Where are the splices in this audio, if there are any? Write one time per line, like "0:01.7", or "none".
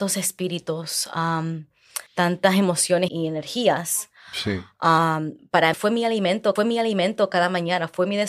0:02.1
0:03.1
0:05.7
0:06.6

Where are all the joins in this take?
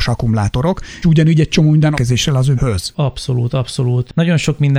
0:01.0
0:01.9
0:02.6

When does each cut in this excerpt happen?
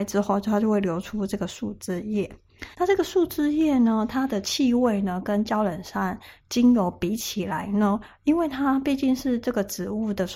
0:02.7

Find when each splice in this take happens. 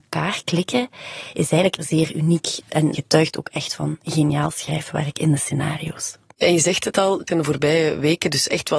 0:01.8
0:07.3

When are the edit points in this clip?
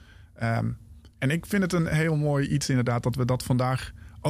0:01.1

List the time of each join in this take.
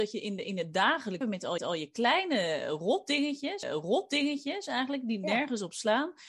0:01.2
0:01.6
0:03.6

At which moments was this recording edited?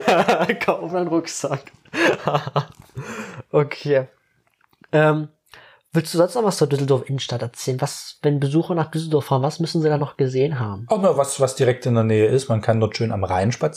none

